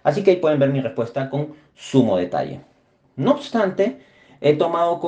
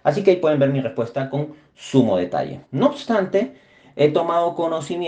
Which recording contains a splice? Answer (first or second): second